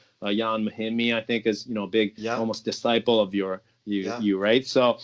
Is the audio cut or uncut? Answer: uncut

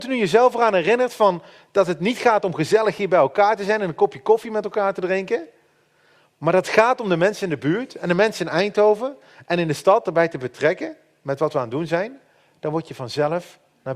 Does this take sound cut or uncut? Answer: uncut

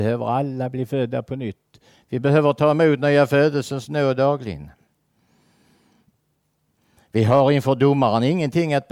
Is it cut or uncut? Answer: uncut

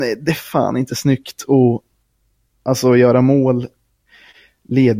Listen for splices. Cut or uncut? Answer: uncut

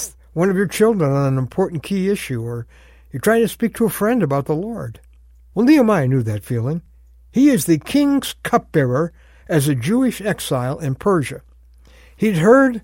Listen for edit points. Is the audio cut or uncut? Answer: uncut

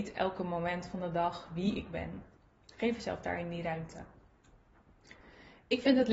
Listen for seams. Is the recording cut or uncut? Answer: uncut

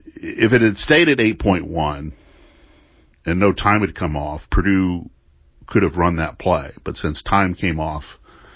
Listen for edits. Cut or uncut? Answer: cut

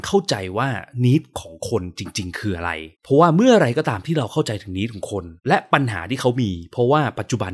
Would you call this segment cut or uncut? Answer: cut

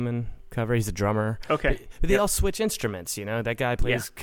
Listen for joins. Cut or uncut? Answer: uncut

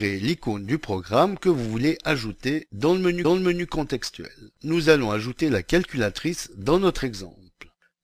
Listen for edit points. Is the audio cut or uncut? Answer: cut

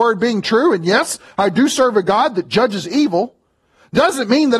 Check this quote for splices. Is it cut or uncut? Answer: uncut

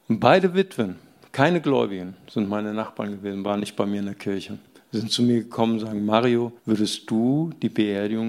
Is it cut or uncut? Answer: cut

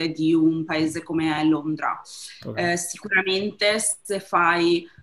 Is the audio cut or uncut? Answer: uncut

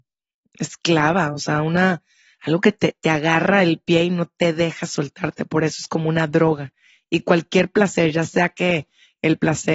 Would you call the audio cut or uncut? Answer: uncut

